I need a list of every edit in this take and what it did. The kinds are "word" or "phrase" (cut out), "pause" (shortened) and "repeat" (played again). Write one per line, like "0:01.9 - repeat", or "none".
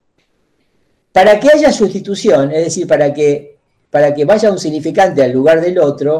none